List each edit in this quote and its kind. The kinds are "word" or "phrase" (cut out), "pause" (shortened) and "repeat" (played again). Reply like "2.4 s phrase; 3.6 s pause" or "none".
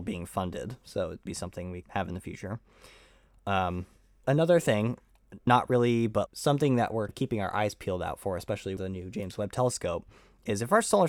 1.3 s word; 1.8 s word; 4.2 s word; 5.5 s word; 6.3 s word; 7.1 s word; 8.8 s word